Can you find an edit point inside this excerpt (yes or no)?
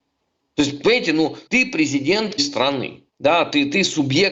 yes